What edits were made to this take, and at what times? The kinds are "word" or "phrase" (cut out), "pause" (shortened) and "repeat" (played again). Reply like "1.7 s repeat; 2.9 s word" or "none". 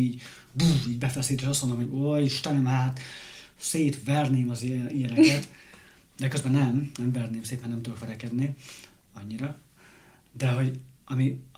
none